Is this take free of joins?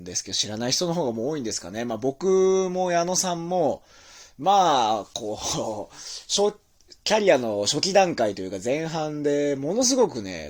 yes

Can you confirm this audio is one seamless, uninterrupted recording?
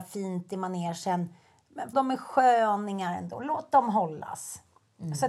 no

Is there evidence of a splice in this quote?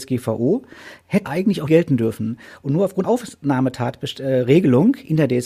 yes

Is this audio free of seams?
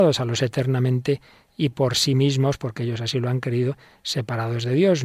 yes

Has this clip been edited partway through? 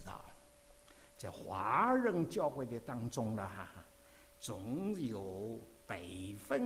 no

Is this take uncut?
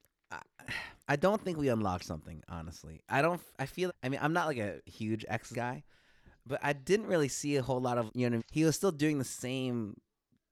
no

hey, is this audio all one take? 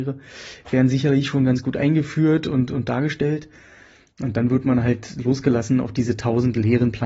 yes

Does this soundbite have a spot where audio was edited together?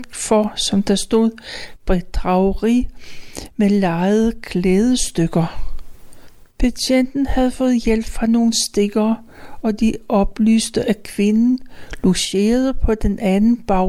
no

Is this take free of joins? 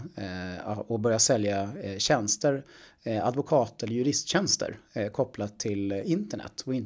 yes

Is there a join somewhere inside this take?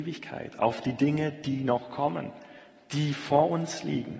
no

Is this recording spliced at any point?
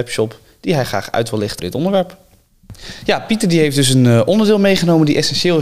yes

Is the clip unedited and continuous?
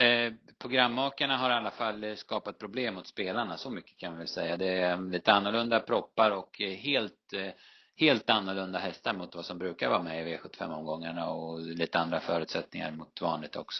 yes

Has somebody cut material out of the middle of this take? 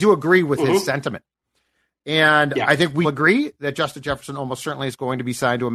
yes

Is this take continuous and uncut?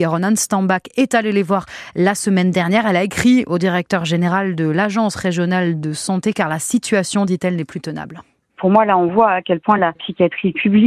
yes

